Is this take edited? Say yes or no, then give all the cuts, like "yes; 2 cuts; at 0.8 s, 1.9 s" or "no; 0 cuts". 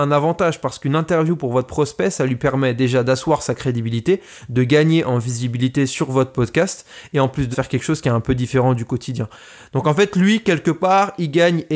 yes; 1 cut; at 7.5 s